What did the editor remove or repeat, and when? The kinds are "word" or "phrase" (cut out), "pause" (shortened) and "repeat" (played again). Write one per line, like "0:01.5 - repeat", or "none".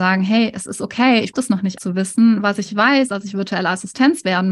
0:01.3 - word
0:01.8 - word
0:03.1 - word